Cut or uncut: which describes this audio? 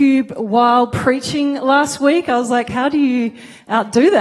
uncut